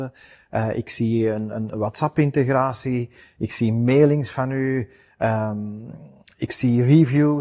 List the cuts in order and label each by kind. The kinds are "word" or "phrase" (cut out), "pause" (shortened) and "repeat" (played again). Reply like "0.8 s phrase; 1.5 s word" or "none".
1.7 s word